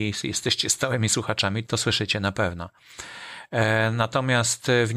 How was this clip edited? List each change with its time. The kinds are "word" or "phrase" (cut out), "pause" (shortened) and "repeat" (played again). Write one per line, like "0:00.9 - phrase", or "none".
0:01.7 - word